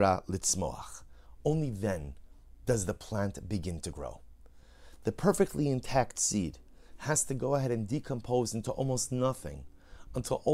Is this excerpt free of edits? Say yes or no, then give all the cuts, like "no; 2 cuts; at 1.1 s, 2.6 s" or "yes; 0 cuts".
yes; 0 cuts